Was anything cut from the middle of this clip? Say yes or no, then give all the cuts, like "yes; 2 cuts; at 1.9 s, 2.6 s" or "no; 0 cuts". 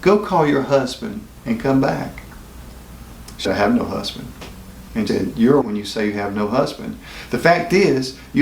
yes; 3 cuts; at 3.4 s, 5.1 s, 5.6 s